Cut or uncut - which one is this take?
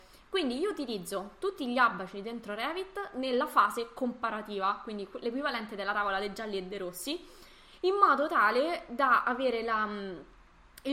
uncut